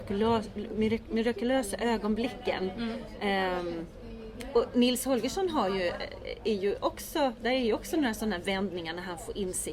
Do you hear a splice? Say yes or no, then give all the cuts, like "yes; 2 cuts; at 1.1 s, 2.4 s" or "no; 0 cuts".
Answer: no; 0 cuts